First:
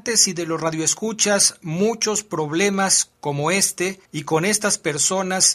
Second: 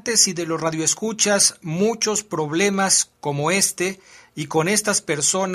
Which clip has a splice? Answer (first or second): first